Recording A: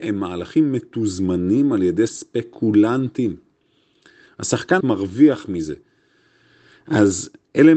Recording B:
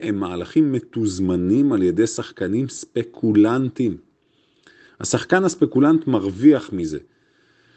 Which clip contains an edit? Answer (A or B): A